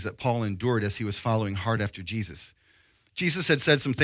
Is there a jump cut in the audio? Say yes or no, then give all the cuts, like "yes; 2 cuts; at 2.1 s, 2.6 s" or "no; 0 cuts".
no; 0 cuts